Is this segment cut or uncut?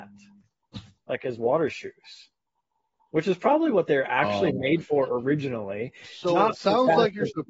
uncut